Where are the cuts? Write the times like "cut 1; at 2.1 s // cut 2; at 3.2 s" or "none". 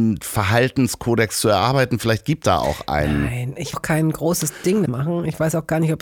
cut 1; at 2.4 s // cut 2; at 3.7 s // cut 3; at 4.9 s